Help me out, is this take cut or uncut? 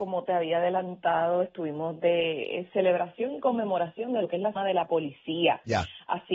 cut